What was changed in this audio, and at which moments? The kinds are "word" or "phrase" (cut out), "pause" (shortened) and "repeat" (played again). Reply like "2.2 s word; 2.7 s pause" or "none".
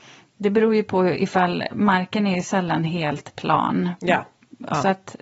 none